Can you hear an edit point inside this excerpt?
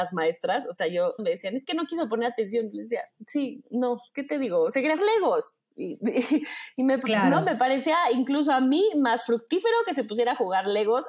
yes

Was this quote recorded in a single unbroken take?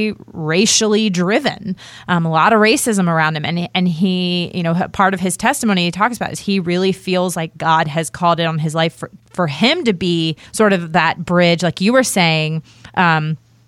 no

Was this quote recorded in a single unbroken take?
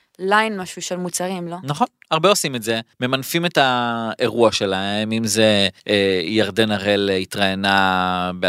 no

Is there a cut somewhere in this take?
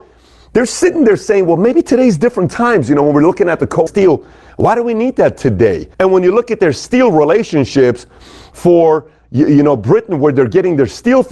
yes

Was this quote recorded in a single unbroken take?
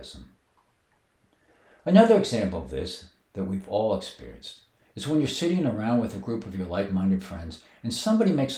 yes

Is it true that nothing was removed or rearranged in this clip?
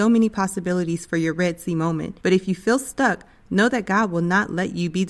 no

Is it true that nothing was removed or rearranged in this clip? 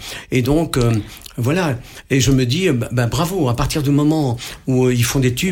yes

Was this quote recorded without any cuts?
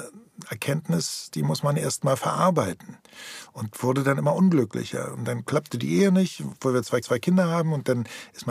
no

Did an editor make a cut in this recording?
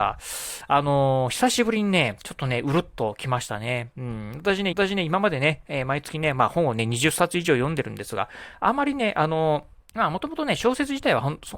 yes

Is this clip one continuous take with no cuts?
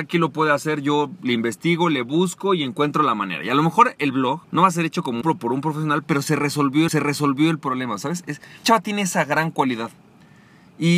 no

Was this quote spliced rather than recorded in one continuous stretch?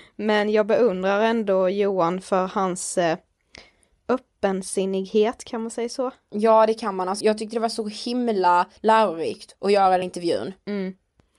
yes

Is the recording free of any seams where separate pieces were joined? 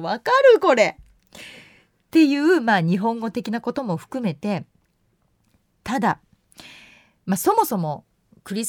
yes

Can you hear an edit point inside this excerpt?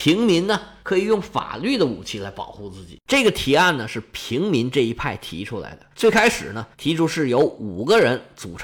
yes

